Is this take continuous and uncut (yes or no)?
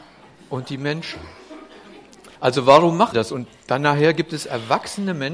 no